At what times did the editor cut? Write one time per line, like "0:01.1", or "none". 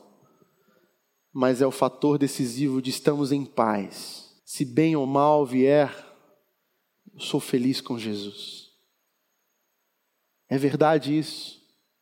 0:04.4